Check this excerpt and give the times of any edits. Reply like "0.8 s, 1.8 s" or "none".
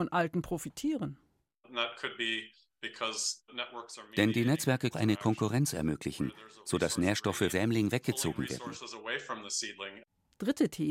4.9 s, 7.5 s